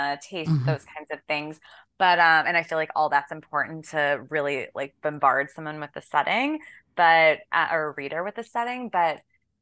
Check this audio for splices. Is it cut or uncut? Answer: uncut